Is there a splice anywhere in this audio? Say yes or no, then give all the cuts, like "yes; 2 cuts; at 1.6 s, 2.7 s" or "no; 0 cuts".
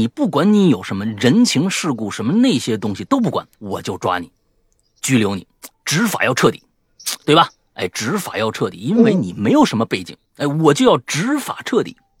yes; 3 cuts; at 3.5 s, 5.7 s, 10.3 s